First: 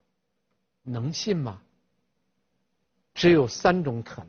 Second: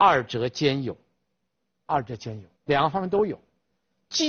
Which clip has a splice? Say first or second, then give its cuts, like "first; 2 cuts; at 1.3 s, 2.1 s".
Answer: second; 2 cuts; at 1.9 s, 2.6 s